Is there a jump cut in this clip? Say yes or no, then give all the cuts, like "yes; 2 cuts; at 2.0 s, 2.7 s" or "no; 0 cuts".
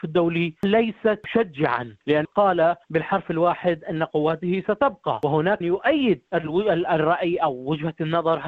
yes; 4 cuts; at 2.2 s, 2.8 s, 5.6 s, 6.3 s